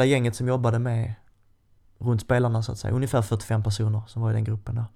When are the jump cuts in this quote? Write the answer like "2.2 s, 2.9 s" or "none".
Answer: none

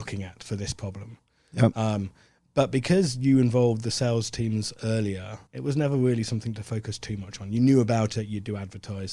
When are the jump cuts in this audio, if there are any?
5.5 s

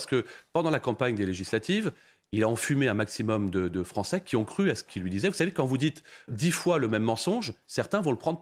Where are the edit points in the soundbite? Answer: 6.3 s

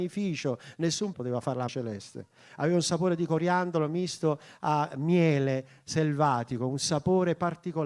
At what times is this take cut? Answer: 1.1 s, 1.7 s

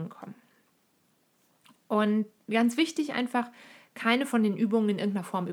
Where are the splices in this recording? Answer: none

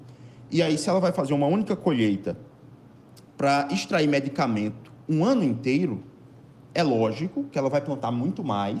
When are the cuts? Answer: none

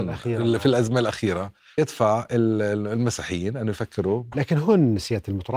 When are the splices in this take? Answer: 1.8 s, 4.3 s

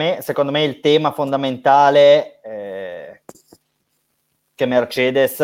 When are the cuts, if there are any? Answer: 2.4 s

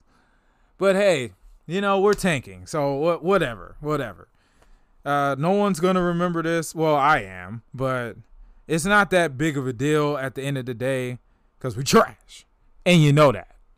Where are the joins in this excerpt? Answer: 7.7 s

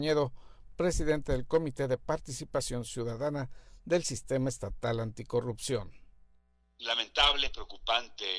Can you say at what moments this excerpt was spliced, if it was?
none

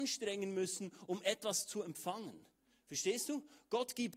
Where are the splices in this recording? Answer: none

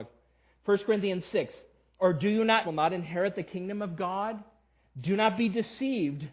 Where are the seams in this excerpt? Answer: 2.6 s

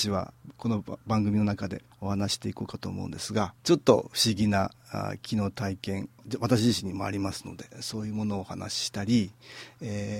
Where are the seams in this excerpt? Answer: 1.9 s, 3.6 s, 6.2 s

